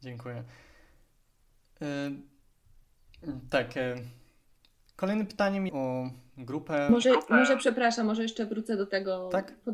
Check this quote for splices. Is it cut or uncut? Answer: cut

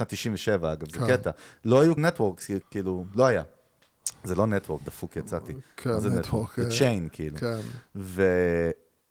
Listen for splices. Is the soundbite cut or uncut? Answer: cut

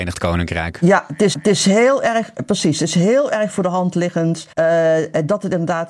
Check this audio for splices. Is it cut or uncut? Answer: cut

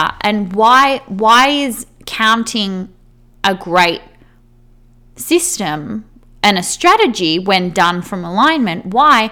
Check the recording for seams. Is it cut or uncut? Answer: uncut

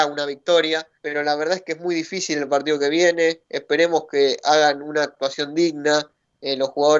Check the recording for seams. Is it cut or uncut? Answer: cut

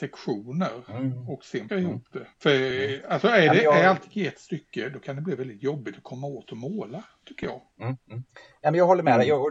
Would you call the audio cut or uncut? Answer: cut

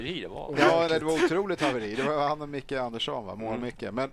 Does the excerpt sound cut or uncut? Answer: uncut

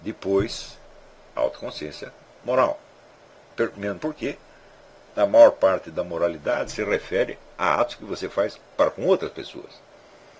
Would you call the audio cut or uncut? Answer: uncut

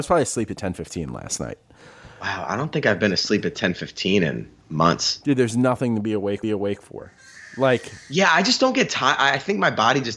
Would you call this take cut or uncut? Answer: cut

